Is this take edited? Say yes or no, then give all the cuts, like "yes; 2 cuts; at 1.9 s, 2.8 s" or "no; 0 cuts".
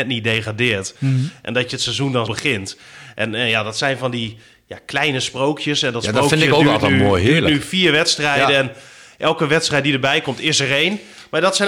yes; 1 cut; at 2.3 s